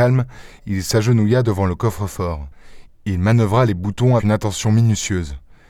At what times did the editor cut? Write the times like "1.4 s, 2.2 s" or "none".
4.2 s